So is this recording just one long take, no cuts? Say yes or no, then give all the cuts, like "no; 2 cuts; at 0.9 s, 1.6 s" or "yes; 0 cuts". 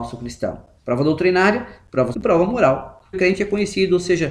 no; 2 cuts; at 2.1 s, 3.1 s